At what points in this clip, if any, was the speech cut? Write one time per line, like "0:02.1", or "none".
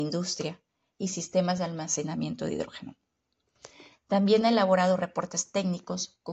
none